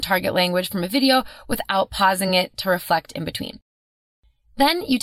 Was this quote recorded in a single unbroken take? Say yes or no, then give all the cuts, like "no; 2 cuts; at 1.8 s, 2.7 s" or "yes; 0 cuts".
yes; 0 cuts